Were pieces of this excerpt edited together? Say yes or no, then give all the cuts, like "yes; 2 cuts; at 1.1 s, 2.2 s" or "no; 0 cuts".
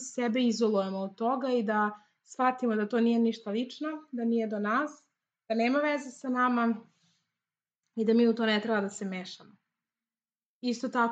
no; 0 cuts